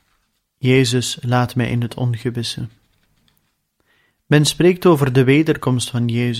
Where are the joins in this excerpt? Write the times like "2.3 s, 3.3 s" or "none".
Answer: none